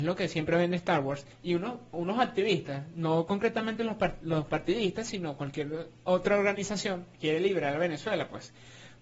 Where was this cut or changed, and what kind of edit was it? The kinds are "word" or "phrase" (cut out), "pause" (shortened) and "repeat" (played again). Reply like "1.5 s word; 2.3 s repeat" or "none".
1.3 s pause; 7.1 s pause